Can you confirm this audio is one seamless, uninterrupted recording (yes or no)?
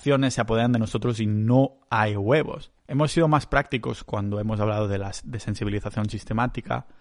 no